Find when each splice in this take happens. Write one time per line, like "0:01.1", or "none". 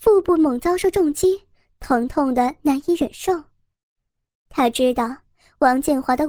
none